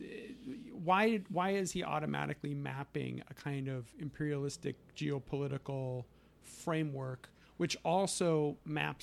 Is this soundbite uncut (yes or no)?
yes